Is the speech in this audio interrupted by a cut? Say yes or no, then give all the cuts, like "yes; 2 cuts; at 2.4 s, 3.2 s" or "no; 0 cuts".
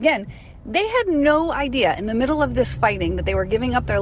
no; 0 cuts